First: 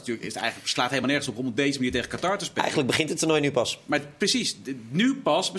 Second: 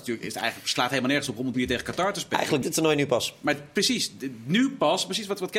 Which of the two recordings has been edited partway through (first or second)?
second